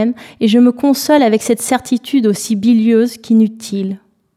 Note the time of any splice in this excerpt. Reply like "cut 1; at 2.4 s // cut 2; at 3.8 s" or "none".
none